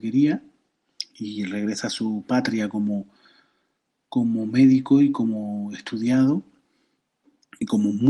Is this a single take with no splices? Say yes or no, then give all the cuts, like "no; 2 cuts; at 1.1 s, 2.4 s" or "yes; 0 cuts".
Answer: yes; 0 cuts